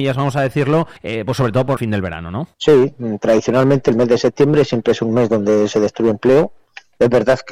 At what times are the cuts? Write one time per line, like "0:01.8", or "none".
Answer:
0:01.0
0:01.8
0:02.5